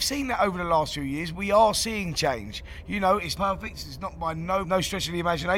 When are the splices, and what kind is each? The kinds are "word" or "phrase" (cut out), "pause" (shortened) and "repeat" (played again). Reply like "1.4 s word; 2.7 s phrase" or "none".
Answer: 3.4 s word; 4.6 s phrase